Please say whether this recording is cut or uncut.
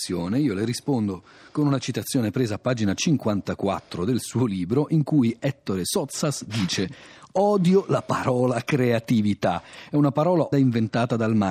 cut